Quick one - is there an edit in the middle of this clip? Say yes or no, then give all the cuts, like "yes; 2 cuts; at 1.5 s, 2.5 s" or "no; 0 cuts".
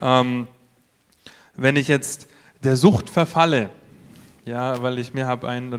no; 0 cuts